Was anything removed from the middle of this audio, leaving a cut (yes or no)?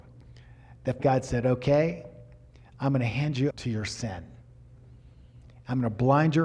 yes